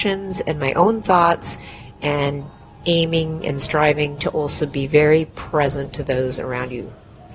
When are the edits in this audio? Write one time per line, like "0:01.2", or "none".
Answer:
none